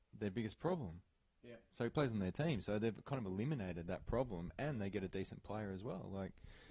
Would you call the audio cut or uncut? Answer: uncut